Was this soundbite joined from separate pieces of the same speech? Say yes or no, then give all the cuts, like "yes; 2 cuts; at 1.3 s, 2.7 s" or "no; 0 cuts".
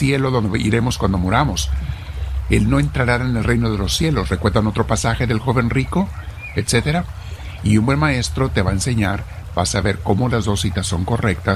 no; 0 cuts